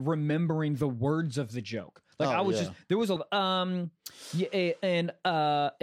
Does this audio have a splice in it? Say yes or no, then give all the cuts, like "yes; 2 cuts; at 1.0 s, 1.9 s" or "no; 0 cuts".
yes; 2 cuts; at 2.1 s, 3.2 s